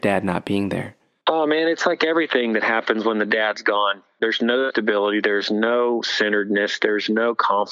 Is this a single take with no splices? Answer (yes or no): yes